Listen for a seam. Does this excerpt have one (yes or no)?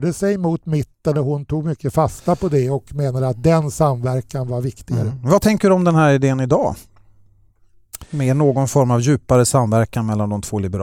no